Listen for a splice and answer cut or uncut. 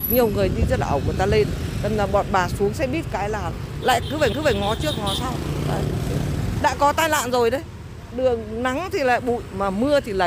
cut